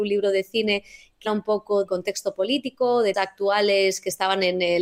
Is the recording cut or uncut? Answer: cut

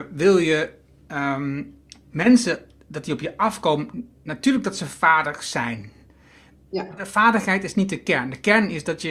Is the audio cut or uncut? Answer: uncut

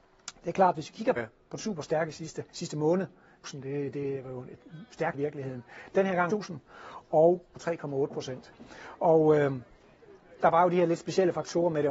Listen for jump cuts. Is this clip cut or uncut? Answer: cut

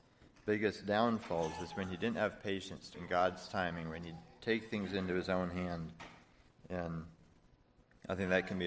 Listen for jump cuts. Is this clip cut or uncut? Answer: cut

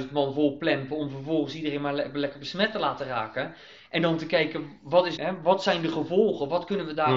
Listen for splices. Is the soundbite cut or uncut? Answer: cut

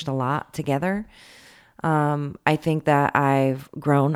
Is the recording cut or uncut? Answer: uncut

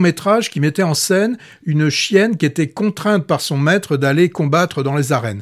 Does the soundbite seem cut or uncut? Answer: uncut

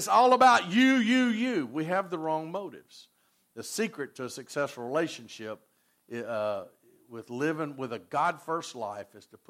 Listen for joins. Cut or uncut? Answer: uncut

